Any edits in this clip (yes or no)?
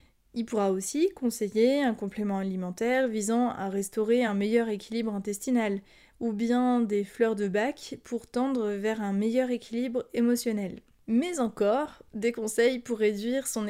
no